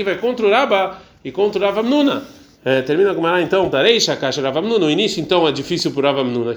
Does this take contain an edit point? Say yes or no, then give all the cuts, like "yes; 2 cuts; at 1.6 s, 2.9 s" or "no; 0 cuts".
yes; 1 cut; at 3.7 s